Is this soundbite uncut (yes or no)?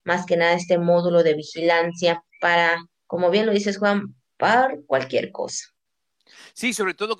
no